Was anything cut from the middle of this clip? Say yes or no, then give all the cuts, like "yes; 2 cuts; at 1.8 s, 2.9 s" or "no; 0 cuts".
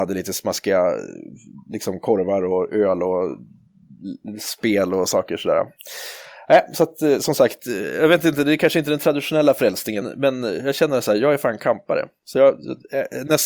yes; 1 cut; at 10.0 s